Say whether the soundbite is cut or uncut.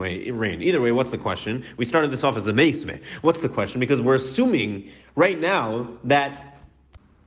uncut